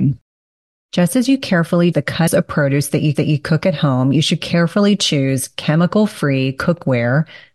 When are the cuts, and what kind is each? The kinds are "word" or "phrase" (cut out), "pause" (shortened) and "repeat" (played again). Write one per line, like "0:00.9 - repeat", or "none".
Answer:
0:01.9 - word
0:02.3 - phrase
0:03.1 - repeat